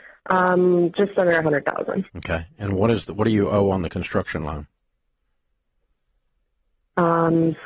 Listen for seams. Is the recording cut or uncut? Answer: cut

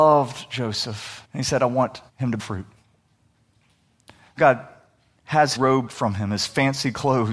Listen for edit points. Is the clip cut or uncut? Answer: cut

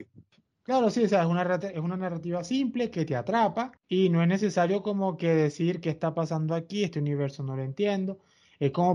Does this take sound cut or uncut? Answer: cut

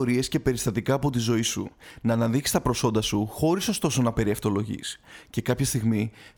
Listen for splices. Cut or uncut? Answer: uncut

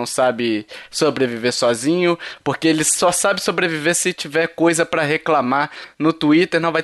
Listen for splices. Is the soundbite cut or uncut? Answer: uncut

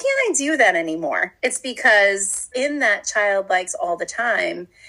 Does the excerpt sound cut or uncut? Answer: cut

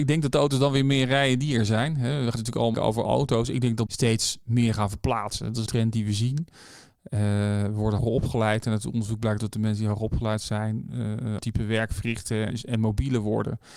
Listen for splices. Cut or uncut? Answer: cut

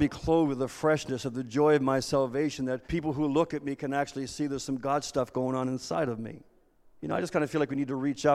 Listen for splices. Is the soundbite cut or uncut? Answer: cut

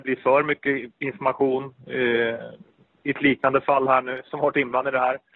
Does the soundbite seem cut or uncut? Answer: uncut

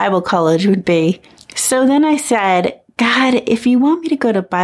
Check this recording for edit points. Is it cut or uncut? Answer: uncut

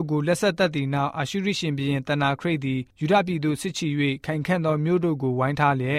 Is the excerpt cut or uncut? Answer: cut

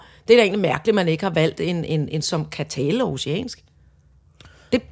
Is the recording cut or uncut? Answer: cut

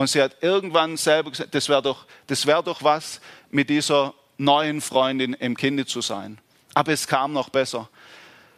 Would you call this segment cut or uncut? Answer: uncut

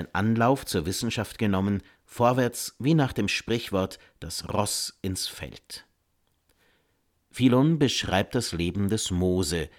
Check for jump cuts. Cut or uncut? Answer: uncut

